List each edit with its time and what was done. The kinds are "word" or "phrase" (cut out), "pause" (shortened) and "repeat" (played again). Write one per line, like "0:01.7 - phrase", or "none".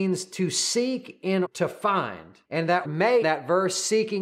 0:01.4 - word
0:02.4 - pause
0:02.8 - word
0:03.2 - word